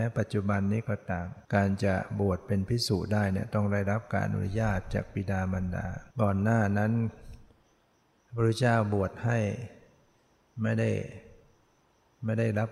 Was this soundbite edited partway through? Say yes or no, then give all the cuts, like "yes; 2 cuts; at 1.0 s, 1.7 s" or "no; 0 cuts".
yes; 2 cuts; at 1.4 s, 6.1 s